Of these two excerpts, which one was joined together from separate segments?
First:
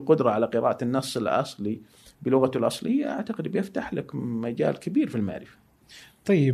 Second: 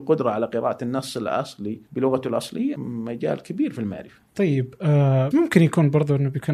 second; 4 cuts; at 1.9 s, 2.7 s, 4.3 s, 5.3 s

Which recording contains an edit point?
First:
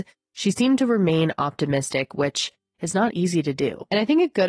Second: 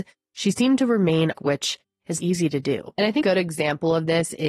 second; 3 cuts; at 1.3 s, 2.2 s, 3.2 s

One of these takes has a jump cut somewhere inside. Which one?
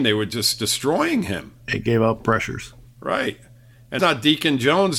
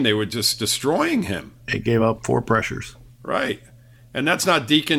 first; 2 cuts; at 2.2 s, 4.0 s

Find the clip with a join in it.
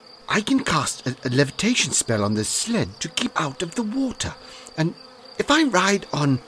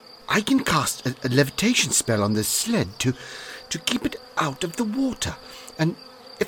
first; 2 cuts; at 3.0 s, 3.3 s

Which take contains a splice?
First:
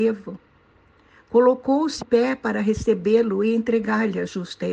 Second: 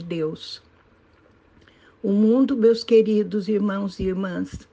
first; 1 cut; at 2.0 s

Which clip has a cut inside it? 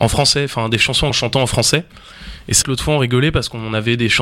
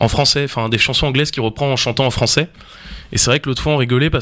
first; 2 cuts; at 1.1 s, 2.6 s

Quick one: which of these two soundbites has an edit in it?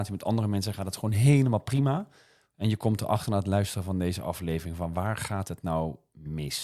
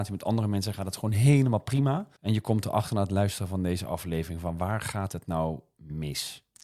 second; 1 cut; at 2.2 s

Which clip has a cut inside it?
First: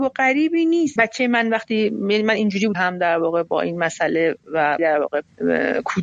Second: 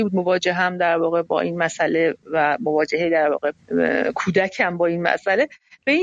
first; 3 cuts; at 1.0 s, 2.7 s, 4.8 s

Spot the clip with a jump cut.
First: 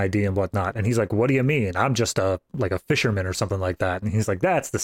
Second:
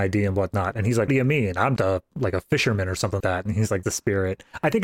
second; 4 cuts; at 1.1 s, 1.8 s, 3.2 s, 3.8 s

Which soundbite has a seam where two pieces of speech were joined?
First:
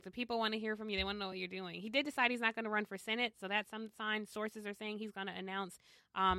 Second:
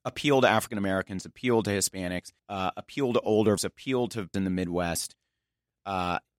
second; 3 cuts; at 2.4 s, 3.6 s, 4.3 s

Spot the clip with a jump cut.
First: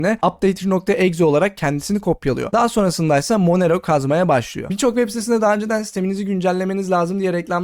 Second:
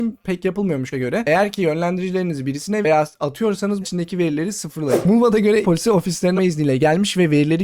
second; 5 cuts; at 0.9 s, 2.8 s, 3.8 s, 5.6 s, 6.4 s

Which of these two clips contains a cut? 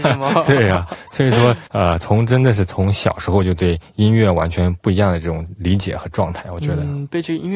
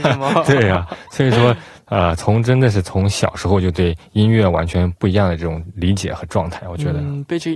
first; 1 cut; at 1.7 s

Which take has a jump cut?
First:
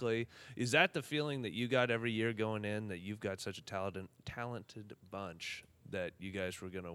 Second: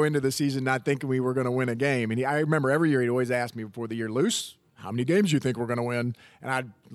second; 1 cut; at 4.7 s

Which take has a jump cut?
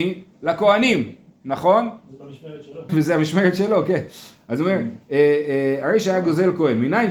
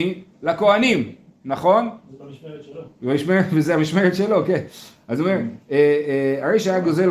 first; 1 cut; at 2.9 s

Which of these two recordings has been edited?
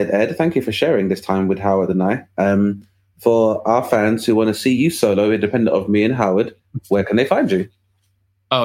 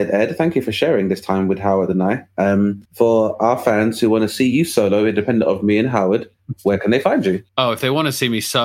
second; 2 cuts; at 2.9 s, 7.5 s

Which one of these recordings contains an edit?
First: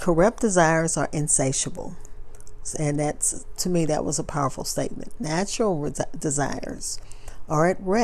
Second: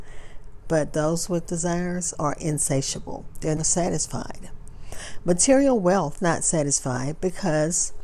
second; 3 cuts; at 1.5 s, 3.6 s, 6.2 s

